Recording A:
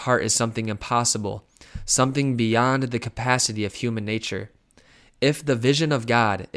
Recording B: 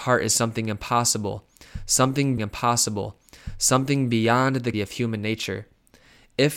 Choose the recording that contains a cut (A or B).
B